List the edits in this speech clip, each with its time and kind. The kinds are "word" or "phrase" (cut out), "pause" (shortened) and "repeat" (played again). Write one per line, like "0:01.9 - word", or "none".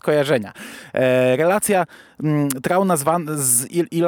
none